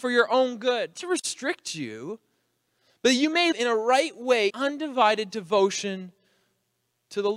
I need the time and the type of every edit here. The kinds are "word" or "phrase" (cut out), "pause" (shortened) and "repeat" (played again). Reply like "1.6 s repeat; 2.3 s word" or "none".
0.9 s word; 3.5 s word; 4.5 s word

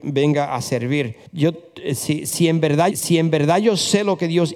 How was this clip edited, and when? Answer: 1.3 s pause; 2.9 s repeat

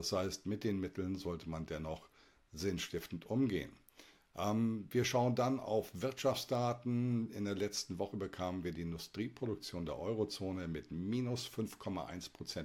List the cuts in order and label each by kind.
none

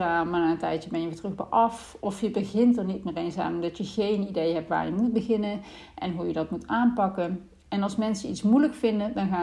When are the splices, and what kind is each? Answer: none

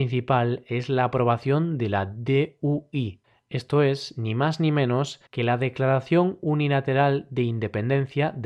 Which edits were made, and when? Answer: 5.3 s pause

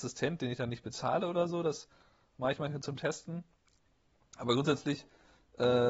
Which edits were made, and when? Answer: none

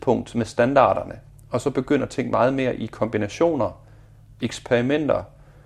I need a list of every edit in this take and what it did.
none

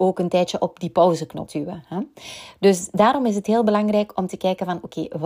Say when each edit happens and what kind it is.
1.5 s word

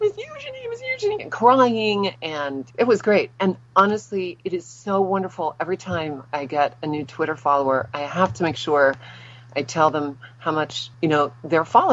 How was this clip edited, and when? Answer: 2.7 s pause; 3.6 s pause; 10.9 s pause

